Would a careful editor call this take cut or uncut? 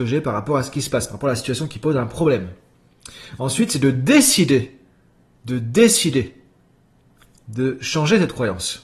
uncut